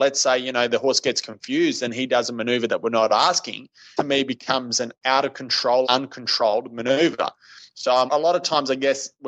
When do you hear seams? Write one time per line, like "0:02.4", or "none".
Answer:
0:04.0
0:05.8
0:08.1